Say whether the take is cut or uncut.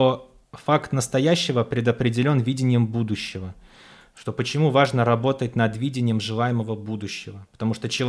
uncut